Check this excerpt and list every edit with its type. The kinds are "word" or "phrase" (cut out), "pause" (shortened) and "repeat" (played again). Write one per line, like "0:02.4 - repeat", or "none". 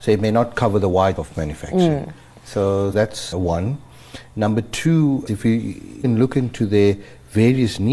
0:01.2 - word
0:02.9 - word
0:03.3 - word
0:05.3 - word
0:06.0 - word